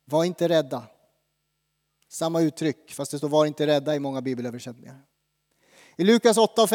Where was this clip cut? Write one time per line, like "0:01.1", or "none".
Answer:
none